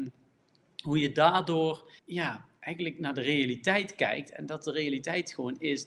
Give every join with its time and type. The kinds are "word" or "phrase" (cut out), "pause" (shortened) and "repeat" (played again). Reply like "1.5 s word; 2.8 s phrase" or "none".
2.0 s pause